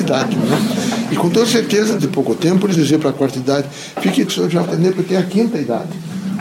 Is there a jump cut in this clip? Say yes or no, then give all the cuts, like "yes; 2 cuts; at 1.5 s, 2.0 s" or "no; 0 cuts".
yes; 4 cuts; at 2.0 s, 2.7 s, 4.3 s, 4.6 s